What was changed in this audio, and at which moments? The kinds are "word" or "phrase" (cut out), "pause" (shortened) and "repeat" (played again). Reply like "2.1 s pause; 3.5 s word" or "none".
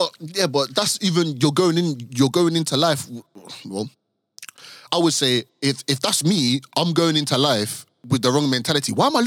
4.9 s word